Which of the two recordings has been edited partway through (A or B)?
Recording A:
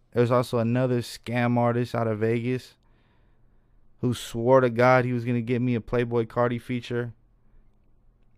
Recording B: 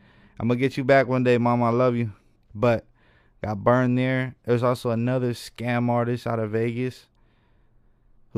B